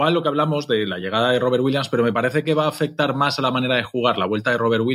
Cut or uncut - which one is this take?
uncut